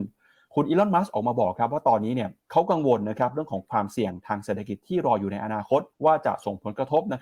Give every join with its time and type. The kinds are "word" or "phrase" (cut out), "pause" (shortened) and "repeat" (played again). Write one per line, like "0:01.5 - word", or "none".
0:02.4 - pause
0:05.9 - pause